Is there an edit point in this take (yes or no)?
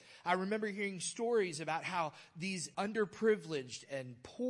yes